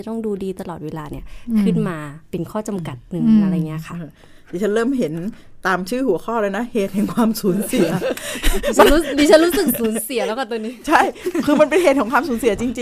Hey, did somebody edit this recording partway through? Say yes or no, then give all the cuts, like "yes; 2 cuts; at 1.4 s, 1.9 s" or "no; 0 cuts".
yes; 1 cut; at 2.2 s